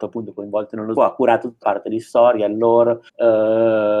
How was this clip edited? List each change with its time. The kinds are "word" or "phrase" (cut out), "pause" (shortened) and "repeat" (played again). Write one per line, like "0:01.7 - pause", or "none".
0:01.0 - word
0:01.6 - word
0:03.1 - pause